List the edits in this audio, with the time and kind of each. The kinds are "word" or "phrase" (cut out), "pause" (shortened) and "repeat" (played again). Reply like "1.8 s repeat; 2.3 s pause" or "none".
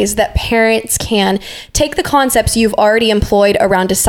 none